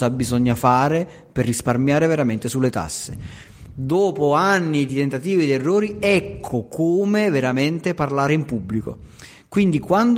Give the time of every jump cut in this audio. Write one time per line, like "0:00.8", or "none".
none